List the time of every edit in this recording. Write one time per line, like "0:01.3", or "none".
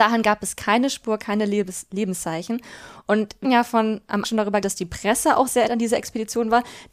0:03.4
0:04.2
0:04.6
0:05.7